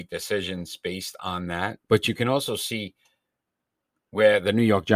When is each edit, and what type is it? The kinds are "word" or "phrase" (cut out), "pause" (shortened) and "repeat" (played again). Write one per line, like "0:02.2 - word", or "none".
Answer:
0:01.8 - pause